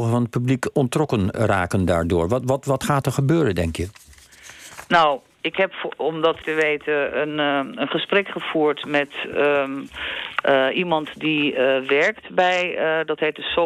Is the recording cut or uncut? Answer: cut